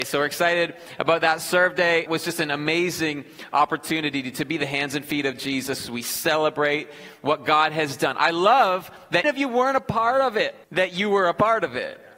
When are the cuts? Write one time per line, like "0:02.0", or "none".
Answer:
0:02.1
0:09.2
0:10.6